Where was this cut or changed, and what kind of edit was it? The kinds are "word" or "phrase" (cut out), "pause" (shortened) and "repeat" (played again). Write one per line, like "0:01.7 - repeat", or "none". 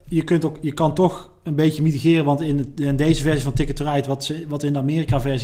none